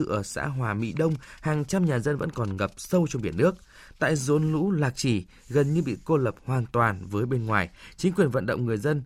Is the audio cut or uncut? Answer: uncut